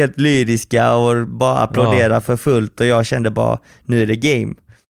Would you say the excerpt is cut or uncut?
uncut